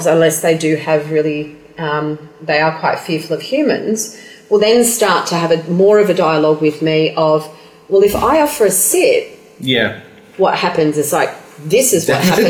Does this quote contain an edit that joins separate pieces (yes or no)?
no